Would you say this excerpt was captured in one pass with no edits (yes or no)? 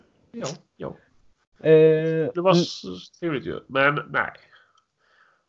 no